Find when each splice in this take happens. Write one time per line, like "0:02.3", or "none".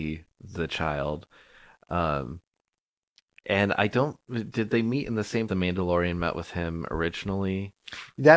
0:05.5